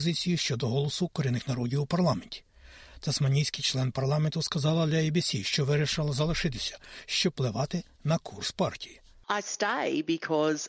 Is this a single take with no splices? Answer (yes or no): yes